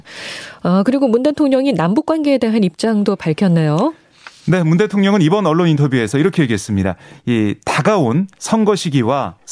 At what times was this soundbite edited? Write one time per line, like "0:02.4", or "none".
0:08.3